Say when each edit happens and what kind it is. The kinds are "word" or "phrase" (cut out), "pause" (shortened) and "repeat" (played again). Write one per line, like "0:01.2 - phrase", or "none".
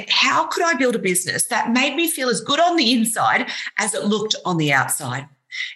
none